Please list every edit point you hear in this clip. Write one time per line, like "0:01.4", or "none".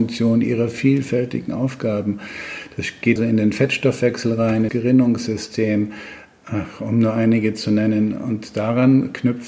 0:03.2
0:04.7